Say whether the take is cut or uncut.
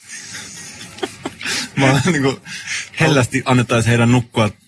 uncut